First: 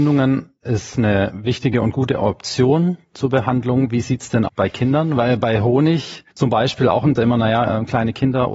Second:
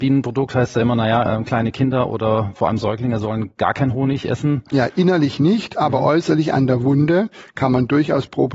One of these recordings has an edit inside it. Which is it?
first; 3 cuts; at 4.5 s, 6.3 s, 7.2 s

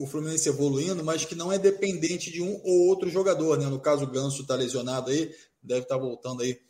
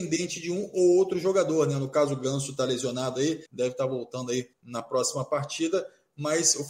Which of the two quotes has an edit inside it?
second; 2 cuts; at 3.5 s, 4.5 s

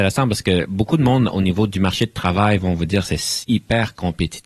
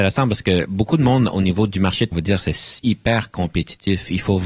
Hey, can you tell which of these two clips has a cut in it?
second; 1 cut; at 2.1 s

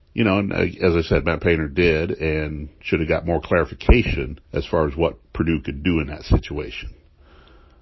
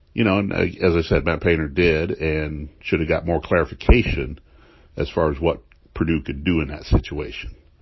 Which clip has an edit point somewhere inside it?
first; 2 cuts; at 4.4 s, 5.2 s

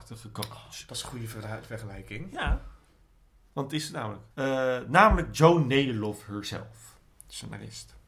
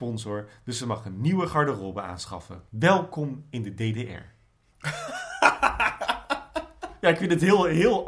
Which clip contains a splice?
second; 1 cut; at 2.7 s

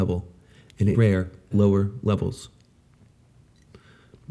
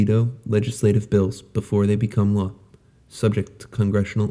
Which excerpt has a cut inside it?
first; 2 cuts; at 0.9 s, 1.5 s

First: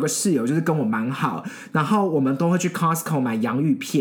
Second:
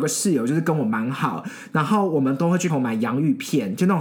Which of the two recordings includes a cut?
second; 1 cut; at 2.7 s

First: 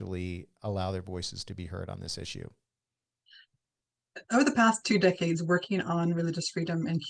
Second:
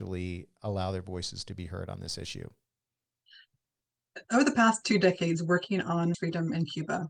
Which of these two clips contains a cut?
second; 1 cut; at 6.1 s

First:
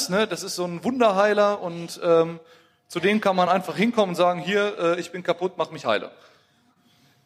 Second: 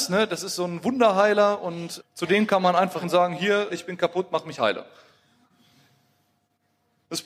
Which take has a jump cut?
second; 3 cuts; at 2.0 s, 3.0 s, 3.7 s

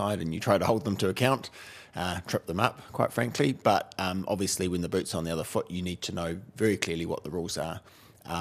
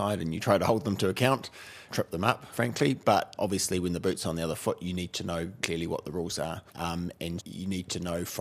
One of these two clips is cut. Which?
second; 6 cuts; at 1.9 s, 2.5 s, 3.4 s, 5.6 s, 6.7 s, 7.4 s

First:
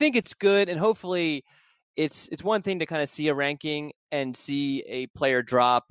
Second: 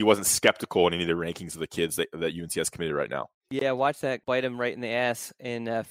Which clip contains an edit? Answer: second; 2 cuts; at 3.4 s, 4.2 s

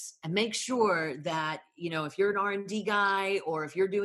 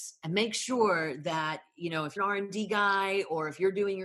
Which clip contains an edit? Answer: second; 1 cut; at 2.2 s

